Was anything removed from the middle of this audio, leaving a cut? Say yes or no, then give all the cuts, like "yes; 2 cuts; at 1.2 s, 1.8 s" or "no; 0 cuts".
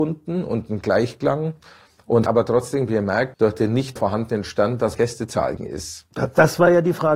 yes; 5 cuts; at 2.3 s, 3.3 s, 4.0 s, 5.0 s, 5.6 s